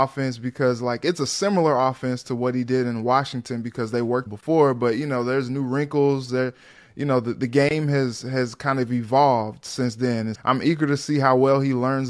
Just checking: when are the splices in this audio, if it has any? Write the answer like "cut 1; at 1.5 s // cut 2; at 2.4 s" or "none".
cut 1; at 4.3 s // cut 2; at 10.3 s